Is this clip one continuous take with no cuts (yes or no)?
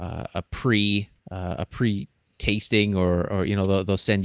no